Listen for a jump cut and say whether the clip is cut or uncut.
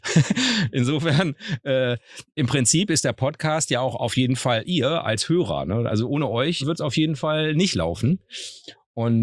cut